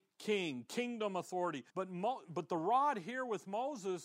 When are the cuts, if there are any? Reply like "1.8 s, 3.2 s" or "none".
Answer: 1.7 s